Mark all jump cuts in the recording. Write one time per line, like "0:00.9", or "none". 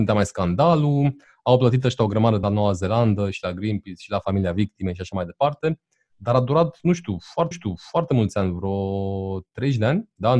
0:02.4
0:07.5